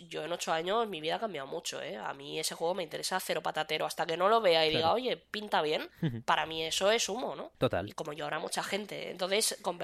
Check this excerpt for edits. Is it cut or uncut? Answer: uncut